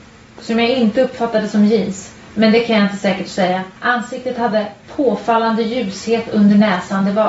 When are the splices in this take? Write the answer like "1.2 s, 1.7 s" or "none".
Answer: 2.2 s, 3.8 s, 4.8 s